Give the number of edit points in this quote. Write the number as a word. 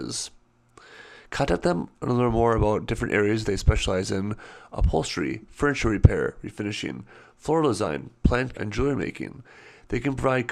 one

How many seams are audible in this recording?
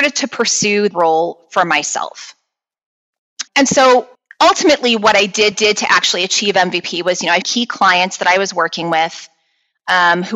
five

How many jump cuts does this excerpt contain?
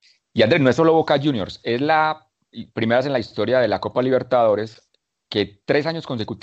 zero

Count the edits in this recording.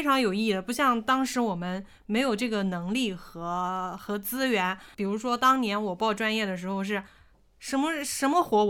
zero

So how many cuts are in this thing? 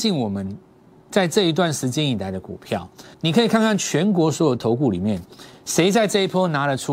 one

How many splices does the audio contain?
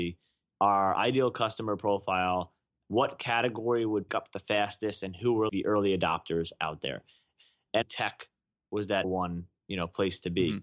four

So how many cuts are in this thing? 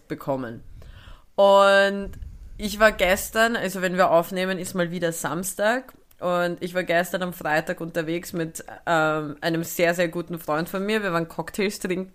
zero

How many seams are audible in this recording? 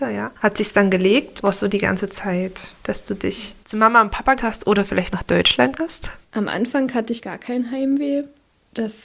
eight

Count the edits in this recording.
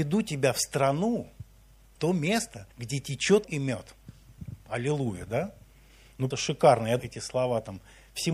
five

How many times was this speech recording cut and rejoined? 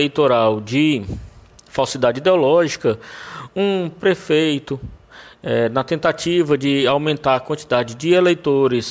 zero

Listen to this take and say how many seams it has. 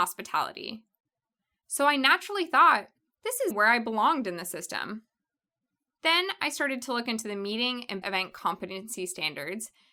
two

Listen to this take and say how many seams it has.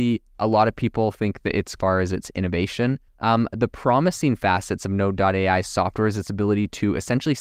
two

